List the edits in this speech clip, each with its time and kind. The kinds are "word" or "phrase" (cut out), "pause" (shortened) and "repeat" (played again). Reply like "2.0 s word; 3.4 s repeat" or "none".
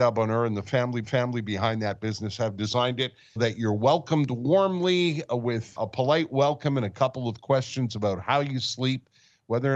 1.0 s repeat; 3.4 s word; 5.8 s word